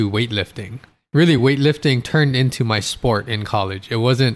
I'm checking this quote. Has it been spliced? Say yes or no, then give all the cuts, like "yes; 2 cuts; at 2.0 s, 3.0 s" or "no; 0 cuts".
no; 0 cuts